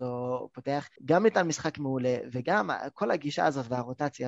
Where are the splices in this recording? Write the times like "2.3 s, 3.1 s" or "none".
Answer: 1.0 s